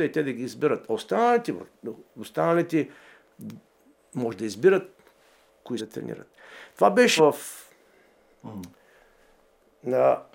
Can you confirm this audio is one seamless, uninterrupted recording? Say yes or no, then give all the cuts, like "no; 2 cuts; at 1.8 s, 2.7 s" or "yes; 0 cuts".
no; 2 cuts; at 5.8 s, 7.2 s